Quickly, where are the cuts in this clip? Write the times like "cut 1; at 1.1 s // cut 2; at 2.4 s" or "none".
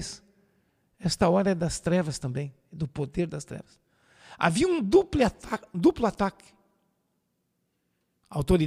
none